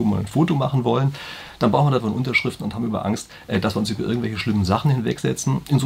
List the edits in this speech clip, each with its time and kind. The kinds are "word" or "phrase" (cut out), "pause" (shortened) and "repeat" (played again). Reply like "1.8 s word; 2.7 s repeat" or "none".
2.0 s word